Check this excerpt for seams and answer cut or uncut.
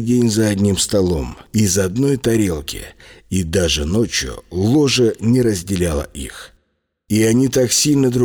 uncut